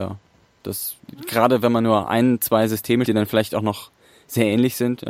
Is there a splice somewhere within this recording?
yes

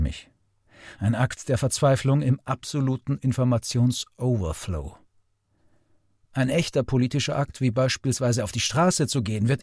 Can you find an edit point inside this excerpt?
no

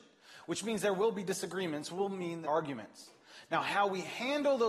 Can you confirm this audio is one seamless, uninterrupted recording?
no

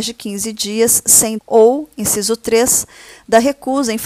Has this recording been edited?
yes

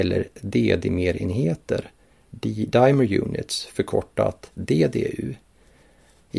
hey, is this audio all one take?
yes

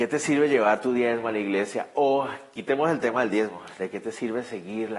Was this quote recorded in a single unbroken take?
yes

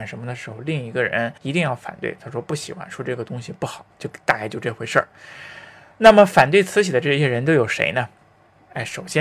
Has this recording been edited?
yes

